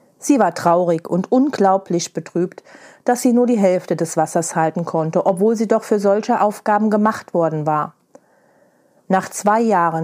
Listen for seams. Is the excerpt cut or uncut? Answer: uncut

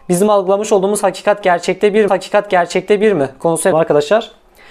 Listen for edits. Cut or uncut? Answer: cut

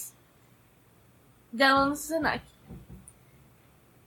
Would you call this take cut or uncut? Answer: uncut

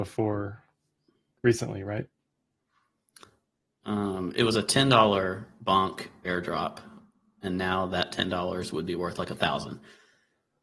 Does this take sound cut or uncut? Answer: uncut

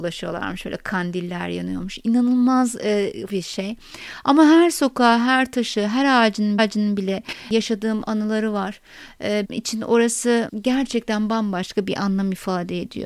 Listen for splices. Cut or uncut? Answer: cut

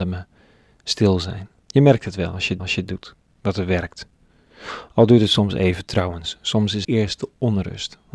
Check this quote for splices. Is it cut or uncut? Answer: cut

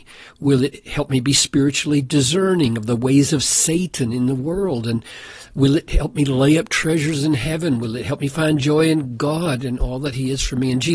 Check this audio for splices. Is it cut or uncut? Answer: uncut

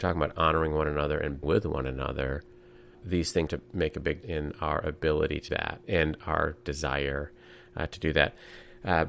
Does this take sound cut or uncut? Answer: cut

